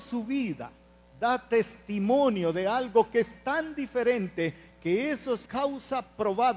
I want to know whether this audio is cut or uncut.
cut